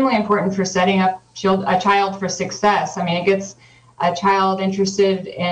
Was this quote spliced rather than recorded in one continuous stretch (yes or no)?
no